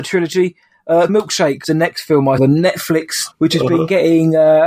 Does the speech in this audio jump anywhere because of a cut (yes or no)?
yes